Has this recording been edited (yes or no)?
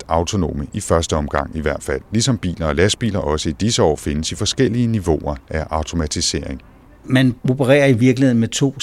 no